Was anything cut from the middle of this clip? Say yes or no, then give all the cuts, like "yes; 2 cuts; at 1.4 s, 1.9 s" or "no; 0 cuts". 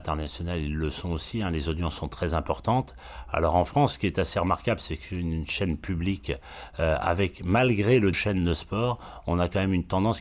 yes; 1 cut; at 8.1 s